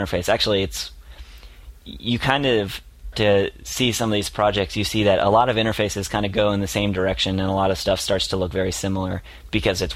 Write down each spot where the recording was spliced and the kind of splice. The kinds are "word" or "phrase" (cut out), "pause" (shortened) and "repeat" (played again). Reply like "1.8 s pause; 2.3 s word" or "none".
3.1 s phrase